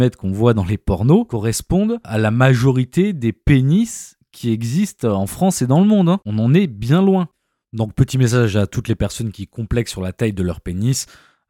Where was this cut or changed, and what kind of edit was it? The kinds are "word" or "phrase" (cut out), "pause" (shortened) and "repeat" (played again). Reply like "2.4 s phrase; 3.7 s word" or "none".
2.0 s word